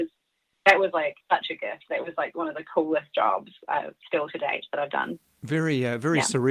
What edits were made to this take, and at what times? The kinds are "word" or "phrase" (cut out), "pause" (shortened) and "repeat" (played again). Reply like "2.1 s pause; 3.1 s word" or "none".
1.2 s pause